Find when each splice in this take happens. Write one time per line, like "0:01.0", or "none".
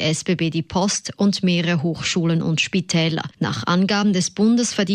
0:03.3